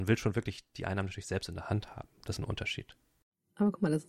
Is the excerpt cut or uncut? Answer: cut